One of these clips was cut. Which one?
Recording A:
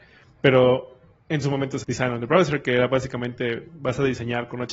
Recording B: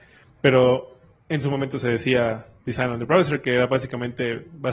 A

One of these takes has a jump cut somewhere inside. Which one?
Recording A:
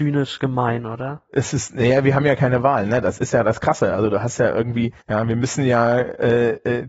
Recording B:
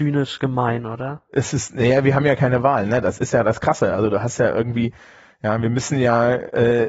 A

